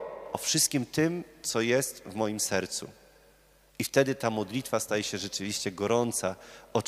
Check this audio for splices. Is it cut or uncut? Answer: uncut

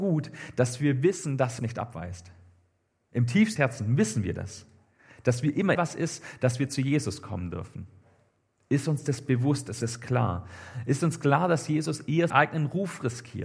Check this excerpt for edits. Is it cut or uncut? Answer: cut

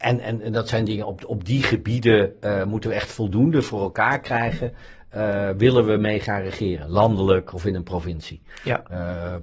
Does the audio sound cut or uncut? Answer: uncut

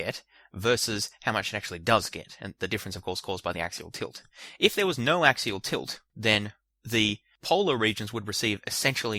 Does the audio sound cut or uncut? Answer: uncut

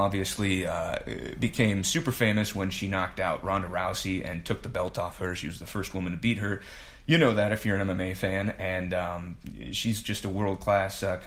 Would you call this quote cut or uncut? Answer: uncut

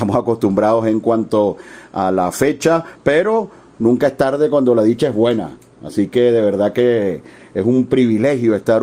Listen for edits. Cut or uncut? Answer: uncut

